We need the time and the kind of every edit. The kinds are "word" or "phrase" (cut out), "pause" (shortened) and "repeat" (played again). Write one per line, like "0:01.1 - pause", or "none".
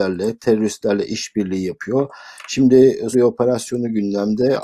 0:03.1 - word